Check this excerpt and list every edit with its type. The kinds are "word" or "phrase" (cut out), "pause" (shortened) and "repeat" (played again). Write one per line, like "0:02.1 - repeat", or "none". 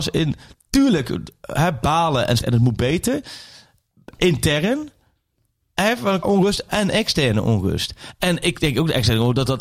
0:02.4 - word
0:06.2 - word
0:06.7 - word